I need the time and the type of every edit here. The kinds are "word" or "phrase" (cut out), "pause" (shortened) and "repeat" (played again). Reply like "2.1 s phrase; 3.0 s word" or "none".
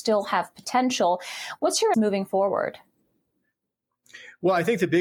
1.9 s word

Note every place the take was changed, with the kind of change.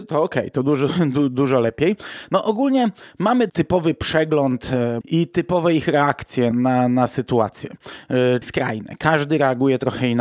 3.5 s word; 5.0 s word; 6.5 s word; 8.4 s word

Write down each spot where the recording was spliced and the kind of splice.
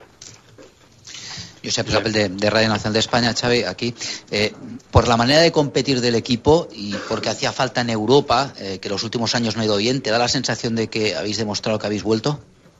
none

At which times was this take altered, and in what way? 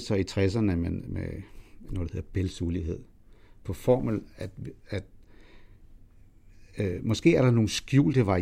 3.6 s phrase

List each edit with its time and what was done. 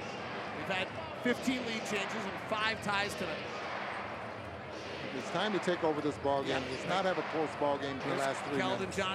8.0 s word

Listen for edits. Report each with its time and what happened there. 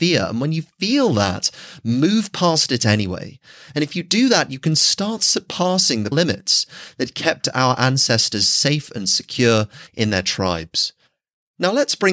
6.1 s word; 9.9 s pause

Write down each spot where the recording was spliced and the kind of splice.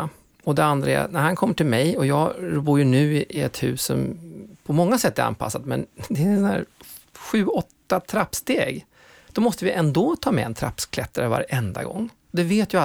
none

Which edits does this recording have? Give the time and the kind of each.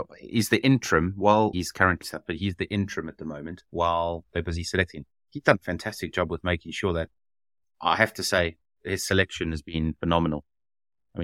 1.5 s word; 2.0 s word

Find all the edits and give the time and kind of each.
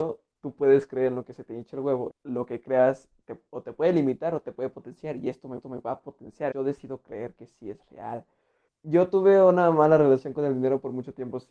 2.1 s word; 5.6 s repeat; 6.5 s word; 8.7 s pause

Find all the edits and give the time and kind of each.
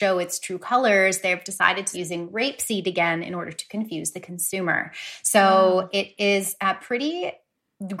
1.9 s word

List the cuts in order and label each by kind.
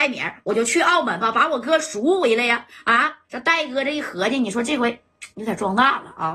3.2 s pause; 5.3 s pause

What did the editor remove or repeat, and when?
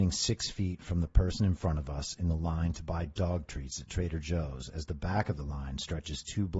none

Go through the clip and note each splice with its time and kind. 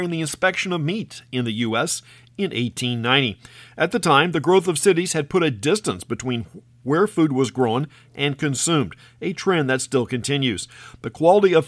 none

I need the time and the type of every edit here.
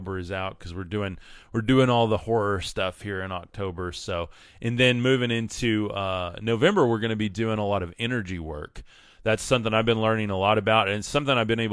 none

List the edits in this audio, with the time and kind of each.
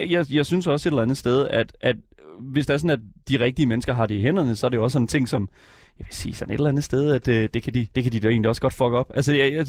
7.9 s pause

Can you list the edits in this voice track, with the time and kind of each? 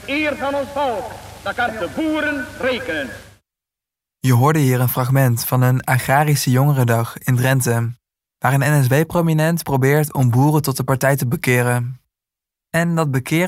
1.7 s word

